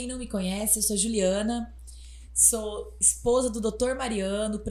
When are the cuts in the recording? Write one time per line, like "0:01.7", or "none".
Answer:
none